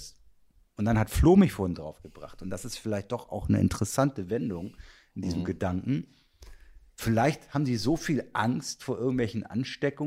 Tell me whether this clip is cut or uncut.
uncut